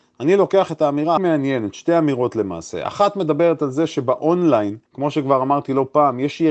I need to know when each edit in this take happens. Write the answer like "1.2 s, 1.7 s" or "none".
1.2 s, 4.9 s